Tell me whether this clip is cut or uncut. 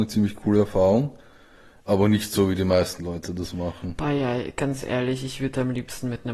uncut